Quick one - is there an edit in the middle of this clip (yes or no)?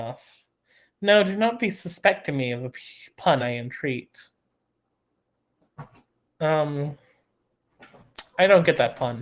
no